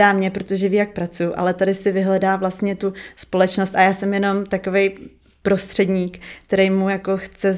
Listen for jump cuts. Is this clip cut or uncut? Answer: uncut